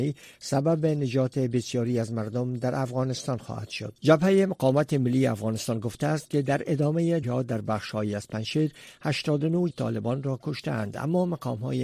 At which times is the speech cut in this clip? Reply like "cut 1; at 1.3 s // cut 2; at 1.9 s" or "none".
cut 1; at 4.0 s // cut 2; at 7.2 s // cut 3; at 9.7 s